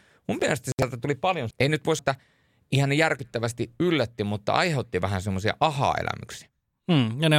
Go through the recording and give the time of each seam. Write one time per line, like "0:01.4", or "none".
0:01.5
0:02.0